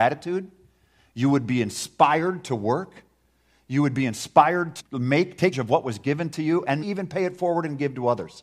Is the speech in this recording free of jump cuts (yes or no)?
no